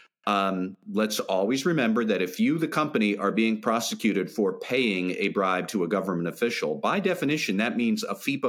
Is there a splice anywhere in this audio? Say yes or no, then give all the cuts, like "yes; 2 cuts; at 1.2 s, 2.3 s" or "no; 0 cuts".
no; 0 cuts